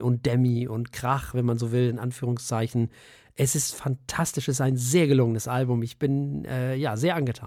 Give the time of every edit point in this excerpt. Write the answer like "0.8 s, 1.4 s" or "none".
none